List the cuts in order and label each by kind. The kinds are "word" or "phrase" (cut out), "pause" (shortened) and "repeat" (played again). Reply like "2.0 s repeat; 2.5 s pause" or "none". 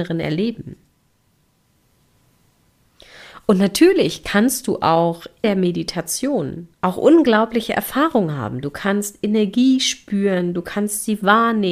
5.4 s word; 6.7 s pause